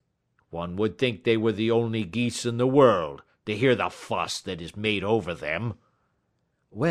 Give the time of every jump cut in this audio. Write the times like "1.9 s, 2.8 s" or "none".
none